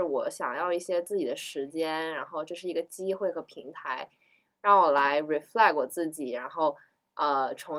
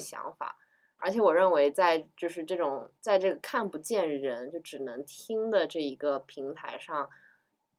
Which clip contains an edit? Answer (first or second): second